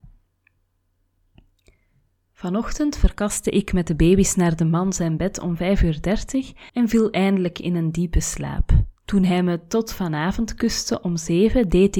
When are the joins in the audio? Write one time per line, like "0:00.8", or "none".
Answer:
0:06.7
0:09.0